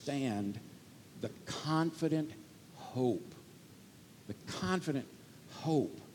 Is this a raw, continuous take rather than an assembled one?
yes; 0 cuts

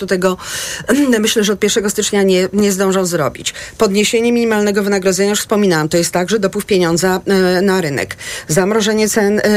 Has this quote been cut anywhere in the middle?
no; 0 cuts

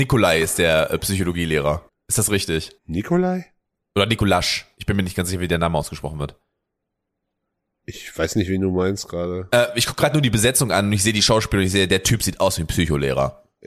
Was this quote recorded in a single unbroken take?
no; 2 cuts; at 1.9 s, 2.8 s

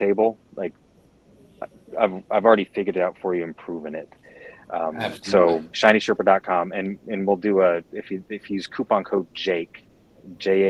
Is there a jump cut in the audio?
no; 0 cuts

